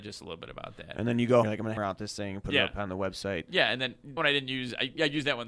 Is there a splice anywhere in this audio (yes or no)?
yes